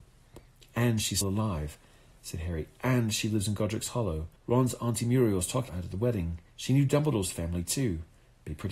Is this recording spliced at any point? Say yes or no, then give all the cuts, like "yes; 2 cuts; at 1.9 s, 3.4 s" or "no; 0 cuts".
yes; 4 cuts; at 1.2 s, 4.4 s, 5.7 s, 6.5 s